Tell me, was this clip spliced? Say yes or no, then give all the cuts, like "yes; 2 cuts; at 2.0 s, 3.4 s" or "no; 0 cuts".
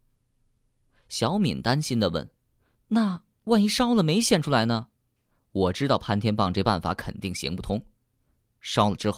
yes; 1 cut; at 5.0 s